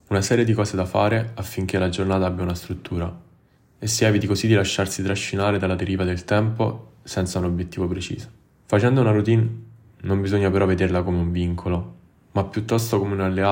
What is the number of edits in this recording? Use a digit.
0